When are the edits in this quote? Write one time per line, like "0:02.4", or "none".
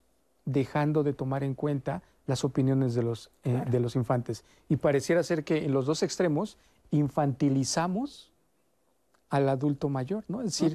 none